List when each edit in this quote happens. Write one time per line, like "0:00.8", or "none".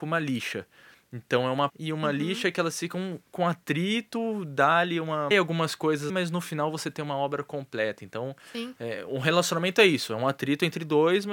0:01.7
0:05.3
0:06.1